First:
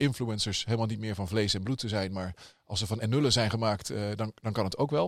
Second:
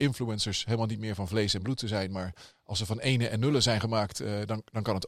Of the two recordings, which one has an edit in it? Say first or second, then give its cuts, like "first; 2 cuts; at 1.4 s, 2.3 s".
first; 1 cut; at 3.0 s